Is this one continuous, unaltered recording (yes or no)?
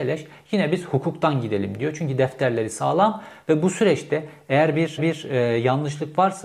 no